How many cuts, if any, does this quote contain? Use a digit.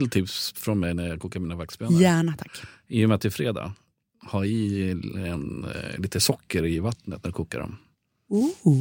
0